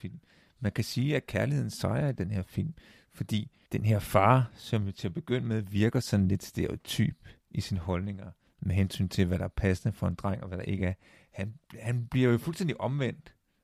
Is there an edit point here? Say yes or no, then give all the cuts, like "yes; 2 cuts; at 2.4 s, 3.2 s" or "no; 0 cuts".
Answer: no; 0 cuts